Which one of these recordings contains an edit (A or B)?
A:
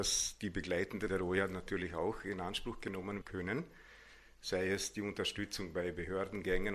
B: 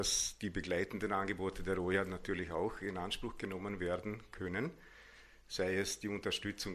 A